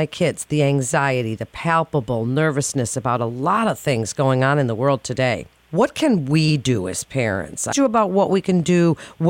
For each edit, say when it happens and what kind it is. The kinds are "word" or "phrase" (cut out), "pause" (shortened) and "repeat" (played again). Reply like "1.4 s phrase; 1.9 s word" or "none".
5.5 s pause; 7.7 s word